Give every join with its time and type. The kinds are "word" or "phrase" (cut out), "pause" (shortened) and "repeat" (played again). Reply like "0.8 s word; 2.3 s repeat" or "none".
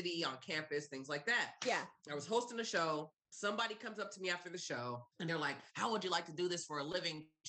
2.0 s pause; 5.1 s pause; 5.7 s pause